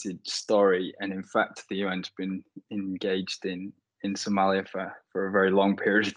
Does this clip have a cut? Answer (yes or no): no